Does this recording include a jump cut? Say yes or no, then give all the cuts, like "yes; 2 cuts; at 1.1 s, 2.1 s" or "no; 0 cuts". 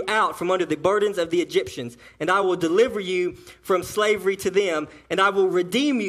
no; 0 cuts